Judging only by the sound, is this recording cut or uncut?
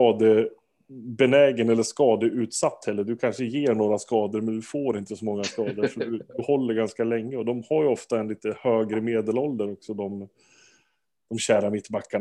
uncut